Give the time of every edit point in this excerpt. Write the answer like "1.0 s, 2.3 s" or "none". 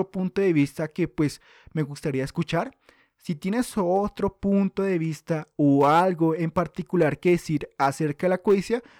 none